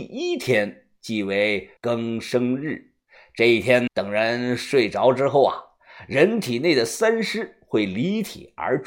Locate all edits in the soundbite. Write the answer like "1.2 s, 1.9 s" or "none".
1.8 s, 3.1 s, 3.9 s